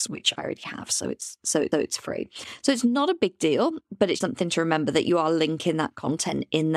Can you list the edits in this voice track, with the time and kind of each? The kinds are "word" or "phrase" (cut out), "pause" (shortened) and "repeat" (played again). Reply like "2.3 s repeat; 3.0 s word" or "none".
1.7 s repeat; 4.2 s word